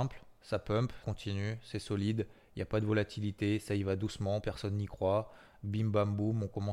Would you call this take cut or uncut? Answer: cut